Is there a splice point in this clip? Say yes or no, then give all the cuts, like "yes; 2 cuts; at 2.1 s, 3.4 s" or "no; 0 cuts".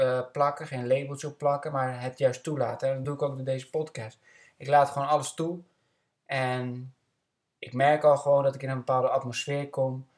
no; 0 cuts